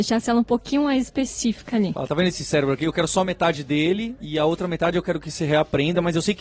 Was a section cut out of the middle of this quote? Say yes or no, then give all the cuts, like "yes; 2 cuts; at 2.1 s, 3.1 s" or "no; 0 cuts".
no; 0 cuts